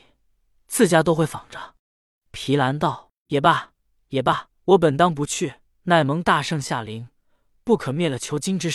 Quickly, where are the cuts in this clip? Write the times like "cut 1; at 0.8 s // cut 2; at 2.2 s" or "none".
cut 1; at 1.8 s // cut 2; at 4.6 s // cut 3; at 5.7 s